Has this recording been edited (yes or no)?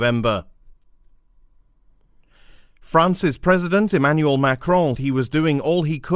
yes